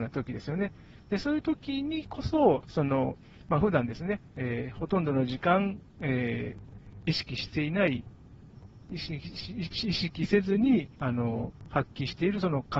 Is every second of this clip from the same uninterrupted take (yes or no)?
no